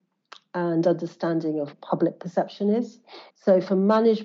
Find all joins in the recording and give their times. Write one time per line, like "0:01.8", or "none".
0:01.7
0:03.3